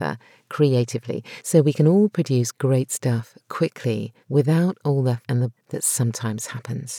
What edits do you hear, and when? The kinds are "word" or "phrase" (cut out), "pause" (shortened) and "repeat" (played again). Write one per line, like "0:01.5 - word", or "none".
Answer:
0:04.2 - pause
0:05.2 - phrase
0:05.6 - word